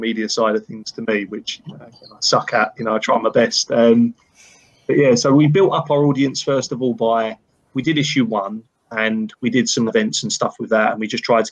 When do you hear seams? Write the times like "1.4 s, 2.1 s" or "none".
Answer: 2.8 s, 7.7 s, 9.9 s